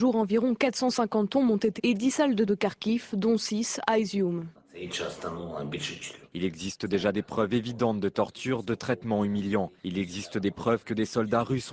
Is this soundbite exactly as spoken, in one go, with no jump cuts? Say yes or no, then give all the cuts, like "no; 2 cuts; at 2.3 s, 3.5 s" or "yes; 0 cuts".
no; 3 cuts; at 1.8 s, 2.5 s, 9.8 s